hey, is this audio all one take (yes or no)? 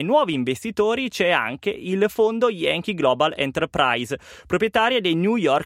yes